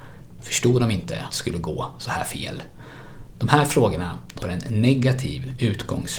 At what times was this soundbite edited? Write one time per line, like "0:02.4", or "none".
0:01.3
0:04.4